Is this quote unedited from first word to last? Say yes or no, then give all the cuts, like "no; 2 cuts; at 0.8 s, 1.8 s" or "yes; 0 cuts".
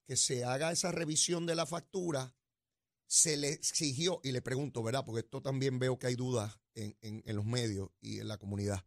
yes; 0 cuts